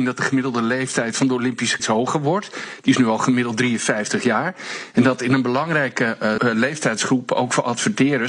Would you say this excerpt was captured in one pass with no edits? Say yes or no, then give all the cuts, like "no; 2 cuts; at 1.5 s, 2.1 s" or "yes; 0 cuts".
no; 2 cuts; at 1.8 s, 6.4 s